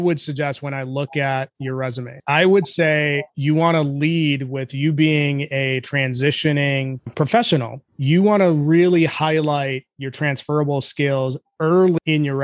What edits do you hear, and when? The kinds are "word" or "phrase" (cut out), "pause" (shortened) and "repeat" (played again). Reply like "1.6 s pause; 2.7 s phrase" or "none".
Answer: 3.3 s pause